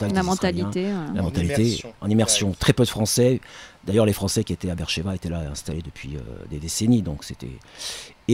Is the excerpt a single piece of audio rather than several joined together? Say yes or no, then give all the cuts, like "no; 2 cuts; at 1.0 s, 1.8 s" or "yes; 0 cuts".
yes; 0 cuts